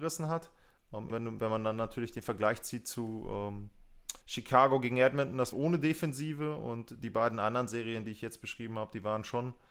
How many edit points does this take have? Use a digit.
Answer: 3